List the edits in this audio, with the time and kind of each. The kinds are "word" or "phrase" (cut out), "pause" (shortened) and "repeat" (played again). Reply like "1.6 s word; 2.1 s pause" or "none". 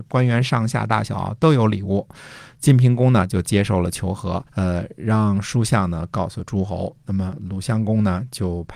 4.5 s pause